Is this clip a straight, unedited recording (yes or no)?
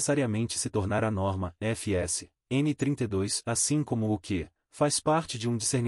yes